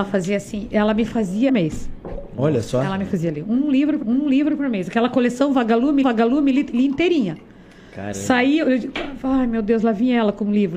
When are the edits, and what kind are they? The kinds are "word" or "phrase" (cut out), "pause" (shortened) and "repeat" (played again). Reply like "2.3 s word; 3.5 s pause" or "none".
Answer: 1.5 s phrase; 4.0 s repeat; 6.0 s repeat